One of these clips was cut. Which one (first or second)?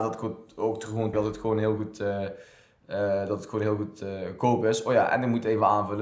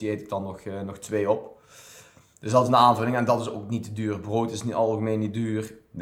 first